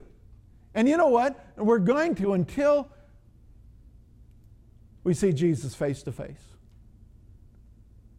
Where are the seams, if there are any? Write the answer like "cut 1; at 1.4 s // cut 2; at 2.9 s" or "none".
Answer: none